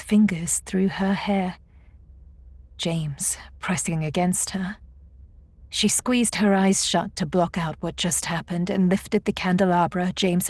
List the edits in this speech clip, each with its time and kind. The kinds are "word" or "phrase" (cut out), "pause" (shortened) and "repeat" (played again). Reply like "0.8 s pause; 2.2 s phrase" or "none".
2.7 s pause; 5.7 s pause

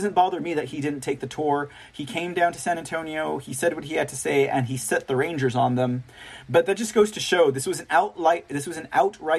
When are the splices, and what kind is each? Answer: none

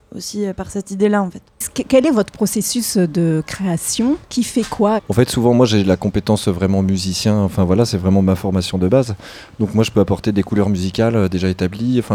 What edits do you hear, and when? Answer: 4.2 s pause

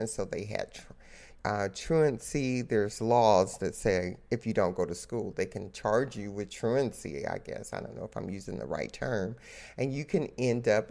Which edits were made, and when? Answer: 1.4 s pause

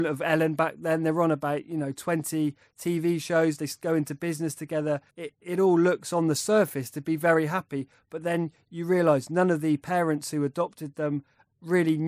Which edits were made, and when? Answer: 5.1 s pause

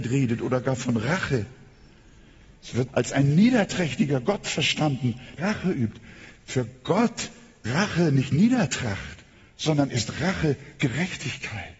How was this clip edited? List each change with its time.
2.9 s word; 5.4 s word; 7.6 s word

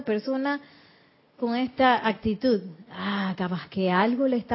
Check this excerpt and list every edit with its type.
1.4 s word

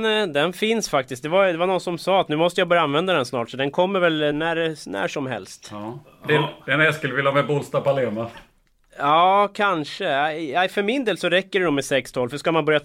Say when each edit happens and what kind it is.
4.3 s word

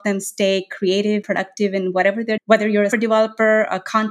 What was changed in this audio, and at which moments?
1.2 s word; 2.4 s word; 2.9 s word

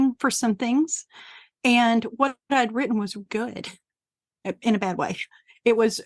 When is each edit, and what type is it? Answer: 3.3 s word

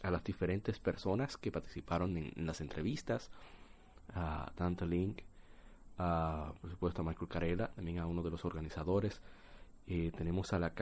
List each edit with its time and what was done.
none

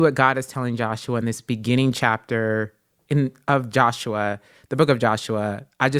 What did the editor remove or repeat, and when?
none

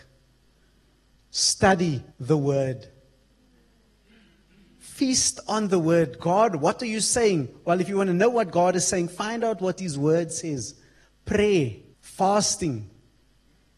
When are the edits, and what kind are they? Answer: 2.1 s pause; 11.9 s pause

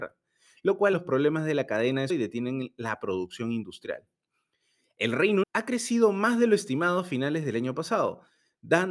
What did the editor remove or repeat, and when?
0.9 s word; 2.1 s word; 5.4 s word

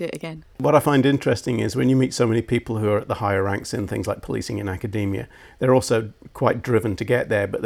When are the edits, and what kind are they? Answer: none

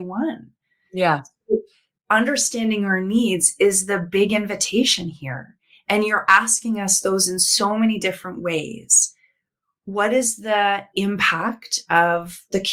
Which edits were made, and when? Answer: none

